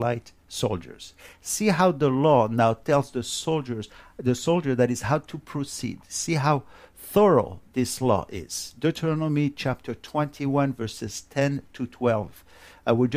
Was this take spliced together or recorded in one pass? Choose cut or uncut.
uncut